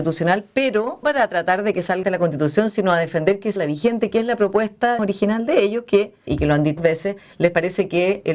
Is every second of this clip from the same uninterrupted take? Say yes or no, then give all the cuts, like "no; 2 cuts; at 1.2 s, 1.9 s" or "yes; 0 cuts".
no; 6 cuts; at 1.0 s, 2.0 s, 3.6 s, 5.0 s, 6.3 s, 6.8 s